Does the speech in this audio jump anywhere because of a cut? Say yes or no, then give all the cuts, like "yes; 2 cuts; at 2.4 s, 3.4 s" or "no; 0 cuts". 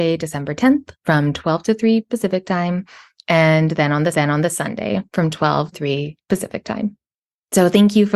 yes; 3 cuts; at 0.9 s, 4.1 s, 5.7 s